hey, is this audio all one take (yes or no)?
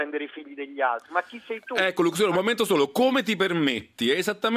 yes